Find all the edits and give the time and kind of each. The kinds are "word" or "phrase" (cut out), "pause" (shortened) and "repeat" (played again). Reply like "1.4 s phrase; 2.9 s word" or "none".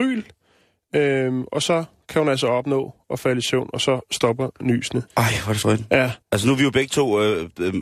5.1 s pause; 5.6 s word; 6.2 s pause

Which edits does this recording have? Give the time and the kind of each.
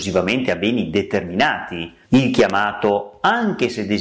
2.0 s pause

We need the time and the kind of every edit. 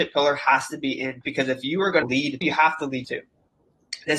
1.2 s word; 2.0 s word; 2.4 s word; 3.0 s word

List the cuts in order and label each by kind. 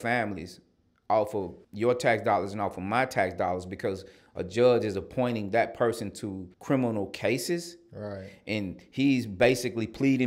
1.6 s pause; 6.5 s pause

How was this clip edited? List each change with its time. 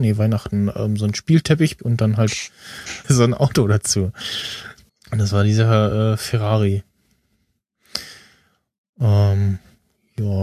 1.8 s phrase; 3.0 s word; 4.9 s pause

